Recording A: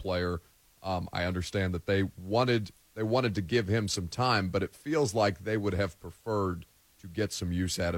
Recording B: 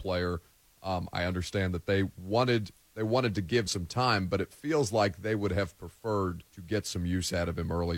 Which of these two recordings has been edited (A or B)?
B